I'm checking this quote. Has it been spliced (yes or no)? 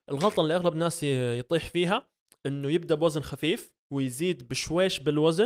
yes